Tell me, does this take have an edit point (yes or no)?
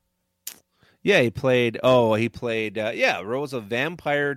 no